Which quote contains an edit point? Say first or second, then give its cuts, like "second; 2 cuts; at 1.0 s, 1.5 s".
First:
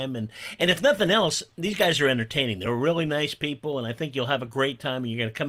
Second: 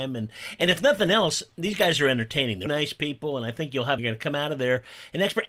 second; 2 cuts; at 2.7 s, 4.0 s